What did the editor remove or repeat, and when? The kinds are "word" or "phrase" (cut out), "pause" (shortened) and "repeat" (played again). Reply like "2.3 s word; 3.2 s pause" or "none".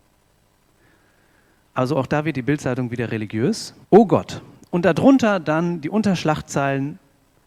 3.8 s pause